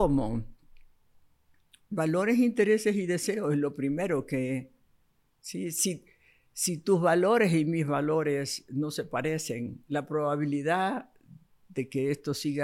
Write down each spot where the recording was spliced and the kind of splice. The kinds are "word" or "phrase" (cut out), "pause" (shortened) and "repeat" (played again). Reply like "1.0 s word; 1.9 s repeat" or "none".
none